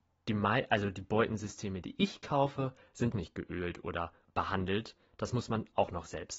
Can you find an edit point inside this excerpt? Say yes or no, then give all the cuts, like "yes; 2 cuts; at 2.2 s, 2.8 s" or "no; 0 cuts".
yes; 2 cuts; at 3.1 s, 4.2 s